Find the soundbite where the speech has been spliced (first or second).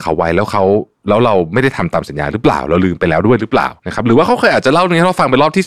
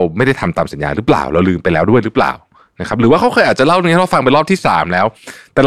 first